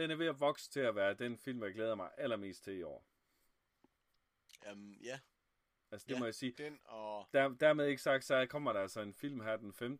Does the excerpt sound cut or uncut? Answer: cut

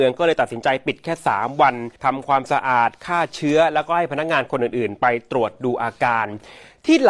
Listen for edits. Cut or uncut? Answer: cut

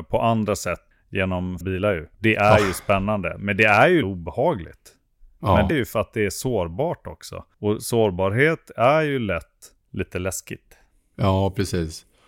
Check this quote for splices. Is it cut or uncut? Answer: cut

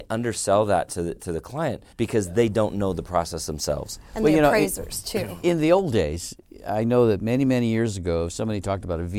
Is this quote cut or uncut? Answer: cut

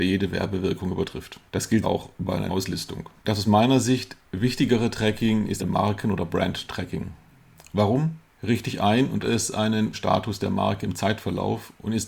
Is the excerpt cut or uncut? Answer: cut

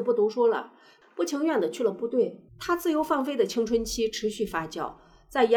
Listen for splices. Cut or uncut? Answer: cut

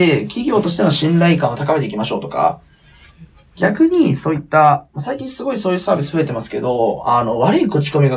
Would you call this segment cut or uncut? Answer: uncut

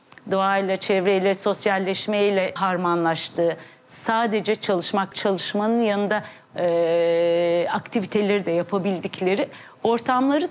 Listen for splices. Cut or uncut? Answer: cut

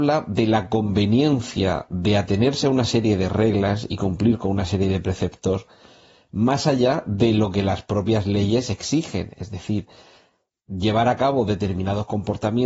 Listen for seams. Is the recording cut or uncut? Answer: uncut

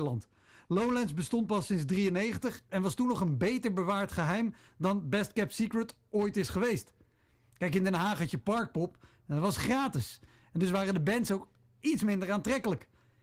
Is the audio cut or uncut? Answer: uncut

